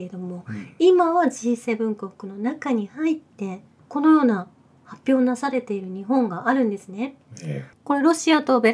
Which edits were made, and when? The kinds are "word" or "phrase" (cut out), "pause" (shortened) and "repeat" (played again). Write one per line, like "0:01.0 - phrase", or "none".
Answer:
none